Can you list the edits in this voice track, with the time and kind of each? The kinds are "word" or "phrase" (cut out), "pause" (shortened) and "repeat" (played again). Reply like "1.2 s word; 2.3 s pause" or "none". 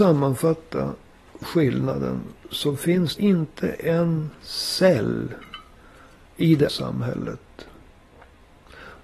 2.4 s pause; 3.2 s word; 4.4 s pause; 6.7 s word